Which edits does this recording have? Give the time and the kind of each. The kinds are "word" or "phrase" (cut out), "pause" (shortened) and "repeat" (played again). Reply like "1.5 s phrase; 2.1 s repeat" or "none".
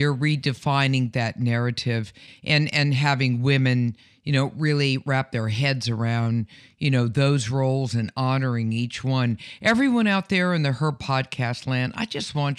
none